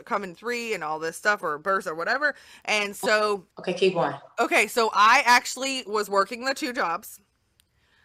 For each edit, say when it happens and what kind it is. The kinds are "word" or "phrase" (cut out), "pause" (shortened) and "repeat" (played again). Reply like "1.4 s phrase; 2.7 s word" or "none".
3.5 s pause